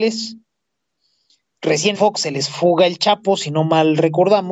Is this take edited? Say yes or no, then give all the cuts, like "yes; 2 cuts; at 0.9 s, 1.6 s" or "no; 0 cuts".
yes; 1 cut; at 1.9 s